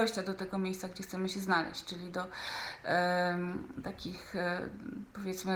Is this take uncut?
yes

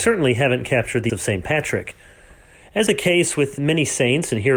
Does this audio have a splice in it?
yes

